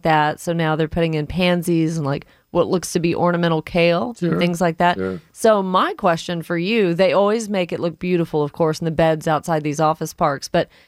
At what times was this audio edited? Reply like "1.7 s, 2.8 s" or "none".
none